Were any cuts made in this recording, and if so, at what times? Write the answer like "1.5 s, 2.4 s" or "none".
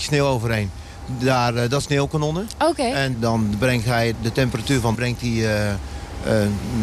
1.8 s, 3.1 s, 4.1 s, 4.9 s